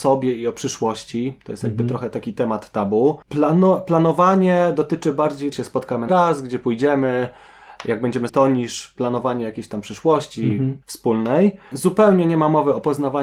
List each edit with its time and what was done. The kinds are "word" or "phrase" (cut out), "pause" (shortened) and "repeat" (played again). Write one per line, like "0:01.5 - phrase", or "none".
0:03.2 - pause
0:05.5 - phrase
0:06.1 - word
0:08.3 - phrase
0:10.8 - pause